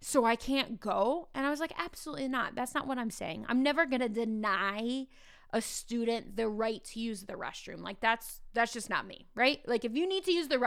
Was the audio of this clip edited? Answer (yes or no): no